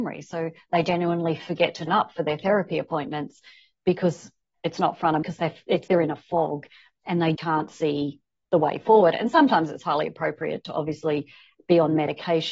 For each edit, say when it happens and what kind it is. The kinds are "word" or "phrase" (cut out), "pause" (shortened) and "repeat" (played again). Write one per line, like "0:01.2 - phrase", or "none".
0:01.9 - word
0:05.2 - word
0:05.9 - word
0:07.4 - word